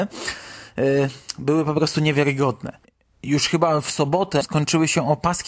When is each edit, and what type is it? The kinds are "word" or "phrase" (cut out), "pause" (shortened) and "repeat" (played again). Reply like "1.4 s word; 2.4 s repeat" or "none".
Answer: 4.4 s word

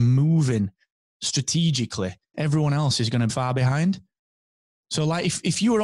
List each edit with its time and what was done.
2.3 s phrase; 3.3 s word

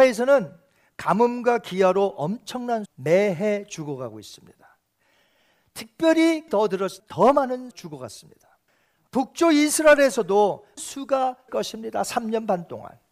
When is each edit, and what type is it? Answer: 2.9 s word; 6.5 s word; 7.0 s word; 7.7 s word; 10.8 s word; 11.5 s word

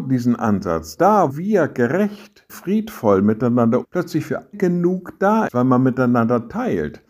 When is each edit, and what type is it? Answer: 1.0 s word; 1.3 s word; 2.5 s word; 3.8 s word; 4.5 s word; 5.5 s word

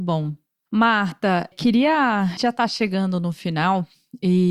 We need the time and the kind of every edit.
1.5 s word; 2.4 s word

